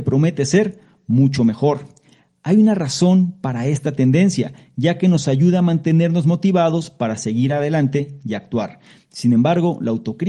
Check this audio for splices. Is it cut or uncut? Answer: uncut